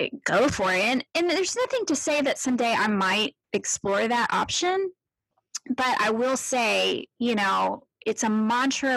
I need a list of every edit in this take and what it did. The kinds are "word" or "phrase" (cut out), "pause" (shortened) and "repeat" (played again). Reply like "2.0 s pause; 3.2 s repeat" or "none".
1.1 s word; 3.4 s pause